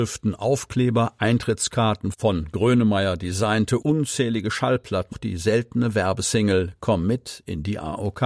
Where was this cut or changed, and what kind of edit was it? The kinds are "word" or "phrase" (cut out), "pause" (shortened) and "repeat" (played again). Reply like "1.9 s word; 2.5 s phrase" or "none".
3.8 s phrase; 5.1 s phrase